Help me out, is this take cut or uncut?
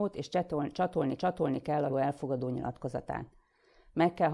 cut